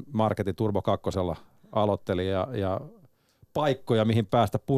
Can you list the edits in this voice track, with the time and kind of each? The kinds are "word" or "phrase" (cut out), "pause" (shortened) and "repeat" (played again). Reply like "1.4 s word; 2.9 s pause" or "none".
none